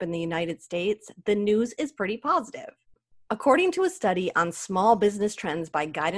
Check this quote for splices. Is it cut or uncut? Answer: uncut